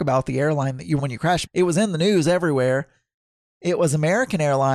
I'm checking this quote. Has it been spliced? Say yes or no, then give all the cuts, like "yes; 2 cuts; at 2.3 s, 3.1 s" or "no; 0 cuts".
yes; 2 cuts; at 1.0 s, 1.5 s